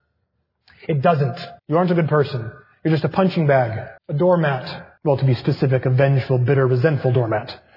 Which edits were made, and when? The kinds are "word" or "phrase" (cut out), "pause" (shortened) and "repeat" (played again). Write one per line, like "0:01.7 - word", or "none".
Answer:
0:01.6 - pause
0:04.0 - pause
0:05.0 - pause